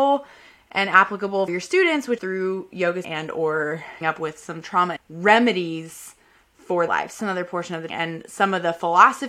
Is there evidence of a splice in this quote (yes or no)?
yes